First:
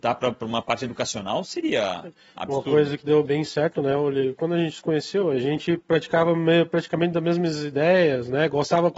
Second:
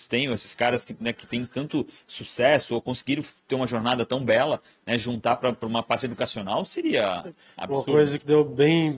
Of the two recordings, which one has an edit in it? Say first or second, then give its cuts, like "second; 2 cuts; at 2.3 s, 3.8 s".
first; 1 cut; at 3.2 s